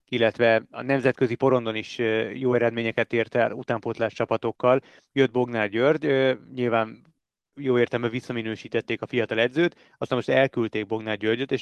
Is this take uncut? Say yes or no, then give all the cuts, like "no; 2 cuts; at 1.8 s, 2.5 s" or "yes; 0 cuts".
yes; 0 cuts